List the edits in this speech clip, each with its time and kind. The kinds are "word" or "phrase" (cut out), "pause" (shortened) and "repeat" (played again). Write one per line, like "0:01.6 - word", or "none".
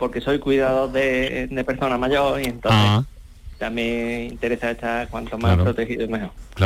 none